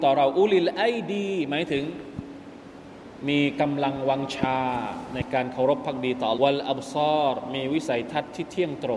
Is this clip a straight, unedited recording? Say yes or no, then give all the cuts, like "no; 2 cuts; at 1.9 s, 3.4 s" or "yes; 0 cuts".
no; 1 cut; at 6.3 s